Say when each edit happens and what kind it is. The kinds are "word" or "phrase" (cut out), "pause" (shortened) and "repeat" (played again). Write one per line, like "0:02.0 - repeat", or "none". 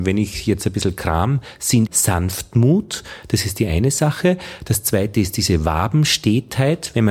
0:01.9 - word